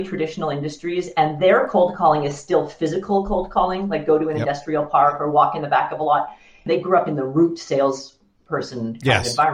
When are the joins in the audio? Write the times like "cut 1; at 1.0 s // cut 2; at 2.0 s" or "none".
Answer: none